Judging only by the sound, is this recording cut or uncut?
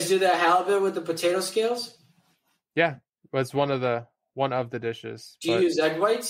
uncut